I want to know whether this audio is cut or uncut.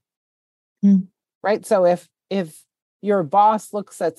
uncut